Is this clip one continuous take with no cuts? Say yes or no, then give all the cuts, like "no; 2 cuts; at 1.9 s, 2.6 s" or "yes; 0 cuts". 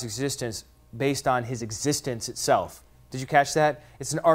yes; 0 cuts